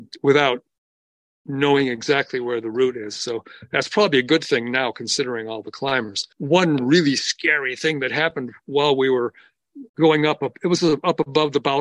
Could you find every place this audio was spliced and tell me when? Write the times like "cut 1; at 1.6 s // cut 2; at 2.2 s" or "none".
cut 1; at 6.3 s // cut 2; at 9.9 s